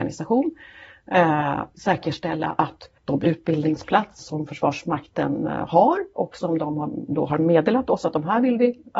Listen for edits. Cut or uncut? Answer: cut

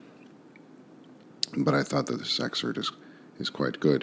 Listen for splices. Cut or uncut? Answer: uncut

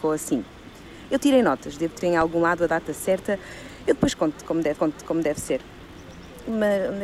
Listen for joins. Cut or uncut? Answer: cut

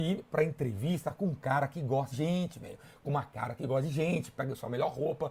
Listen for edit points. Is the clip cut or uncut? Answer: cut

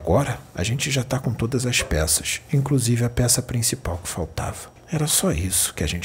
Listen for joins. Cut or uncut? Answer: cut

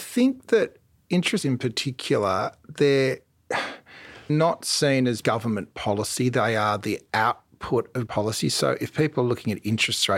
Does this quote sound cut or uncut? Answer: cut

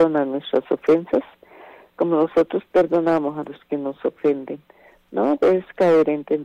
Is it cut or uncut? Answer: uncut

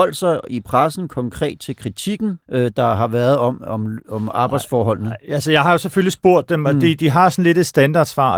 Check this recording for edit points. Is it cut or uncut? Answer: cut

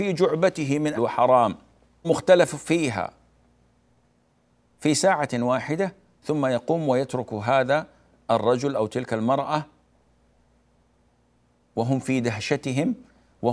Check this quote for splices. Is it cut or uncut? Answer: cut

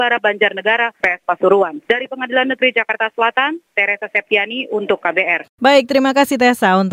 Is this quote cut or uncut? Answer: cut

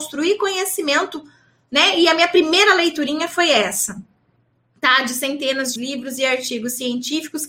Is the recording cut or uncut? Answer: cut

